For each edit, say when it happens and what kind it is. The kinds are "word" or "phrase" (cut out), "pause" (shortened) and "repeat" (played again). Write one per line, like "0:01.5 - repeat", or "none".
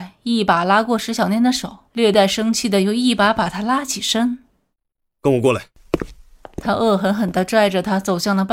none

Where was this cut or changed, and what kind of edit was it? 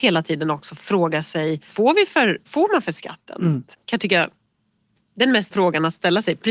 0:01.7 - word
0:02.5 - word
0:03.7 - word
0:05.5 - word

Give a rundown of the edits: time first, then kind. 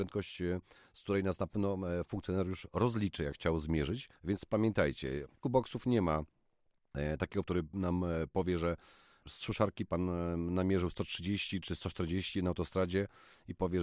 0:03.3 - word
0:04.2 - pause
0:05.4 - word
0:07.4 - word

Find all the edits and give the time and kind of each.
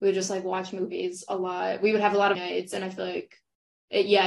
0:02.3 - word

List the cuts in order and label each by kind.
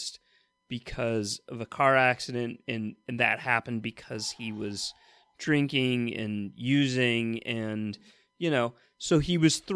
none

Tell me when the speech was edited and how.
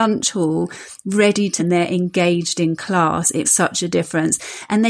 0:01.6 - word
0:03.4 - word

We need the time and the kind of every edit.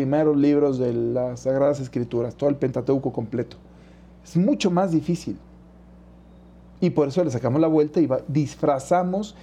none

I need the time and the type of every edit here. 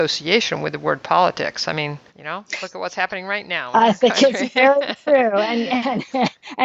0:02.1 - pause

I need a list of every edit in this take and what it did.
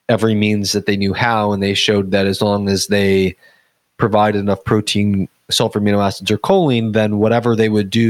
none

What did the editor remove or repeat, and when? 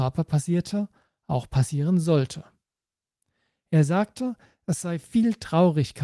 none

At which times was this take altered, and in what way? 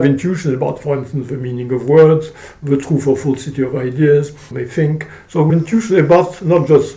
0:04.5 - phrase
0:05.5 - word

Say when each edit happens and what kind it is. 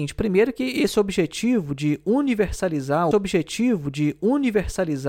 0:03.1 - repeat

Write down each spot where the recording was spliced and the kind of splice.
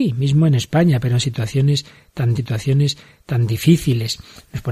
0:02.4 - repeat

